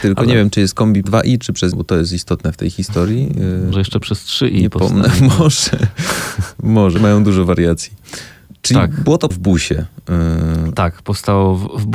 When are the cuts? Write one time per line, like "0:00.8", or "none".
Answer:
0:01.0
0:01.7
0:03.7
0:07.0
0:09.3